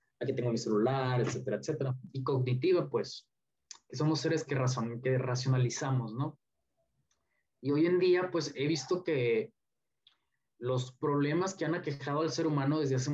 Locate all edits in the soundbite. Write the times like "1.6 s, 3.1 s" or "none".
none